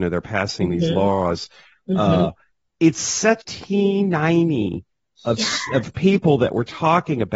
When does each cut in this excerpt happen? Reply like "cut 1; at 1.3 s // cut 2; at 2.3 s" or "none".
cut 1; at 3.4 s // cut 2; at 5.1 s